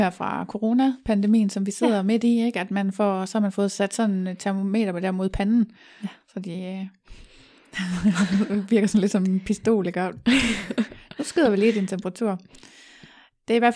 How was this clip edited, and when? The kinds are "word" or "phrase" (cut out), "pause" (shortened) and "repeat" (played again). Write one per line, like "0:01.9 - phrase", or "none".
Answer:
none